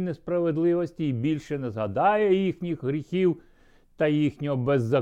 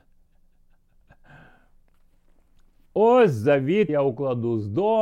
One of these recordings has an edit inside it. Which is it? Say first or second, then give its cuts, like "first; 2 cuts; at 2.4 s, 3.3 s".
second; 1 cut; at 3.9 s